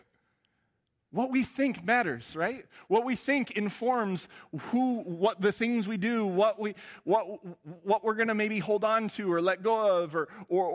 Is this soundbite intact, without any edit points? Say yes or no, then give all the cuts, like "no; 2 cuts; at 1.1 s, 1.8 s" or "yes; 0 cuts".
yes; 0 cuts